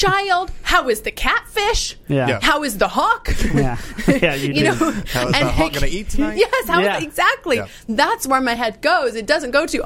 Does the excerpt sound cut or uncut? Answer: uncut